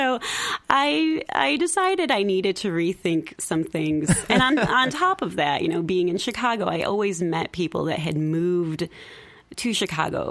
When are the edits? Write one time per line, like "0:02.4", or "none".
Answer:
none